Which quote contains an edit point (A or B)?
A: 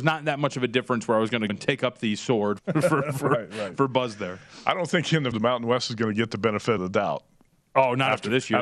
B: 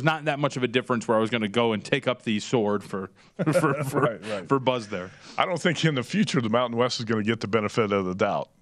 A